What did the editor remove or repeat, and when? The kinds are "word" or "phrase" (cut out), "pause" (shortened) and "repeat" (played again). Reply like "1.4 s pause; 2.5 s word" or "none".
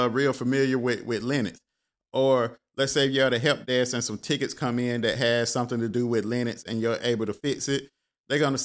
none